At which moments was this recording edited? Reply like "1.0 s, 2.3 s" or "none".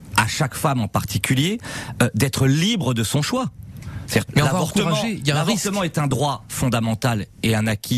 4.3 s